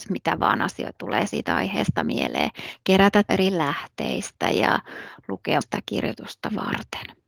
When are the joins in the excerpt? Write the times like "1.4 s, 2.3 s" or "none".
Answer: 0.9 s, 3.3 s, 5.6 s